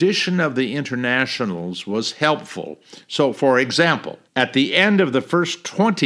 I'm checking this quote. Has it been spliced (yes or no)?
yes